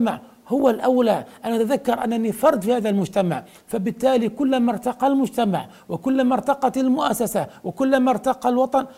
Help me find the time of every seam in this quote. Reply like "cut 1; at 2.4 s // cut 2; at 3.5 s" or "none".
none